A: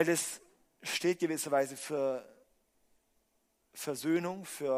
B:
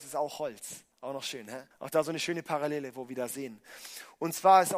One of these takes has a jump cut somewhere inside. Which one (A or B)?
B